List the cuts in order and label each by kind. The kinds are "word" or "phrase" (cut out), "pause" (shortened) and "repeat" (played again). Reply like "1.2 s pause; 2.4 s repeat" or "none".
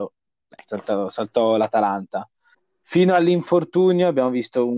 2.5 s pause